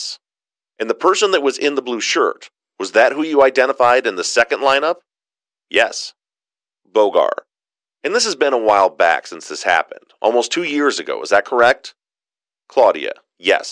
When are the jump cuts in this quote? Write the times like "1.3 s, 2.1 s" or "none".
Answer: none